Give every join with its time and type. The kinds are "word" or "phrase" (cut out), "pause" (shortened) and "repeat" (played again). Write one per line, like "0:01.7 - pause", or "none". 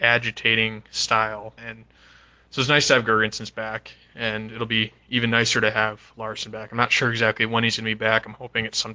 0:01.6 - pause